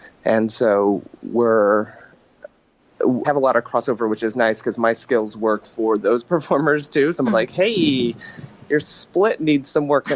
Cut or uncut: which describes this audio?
cut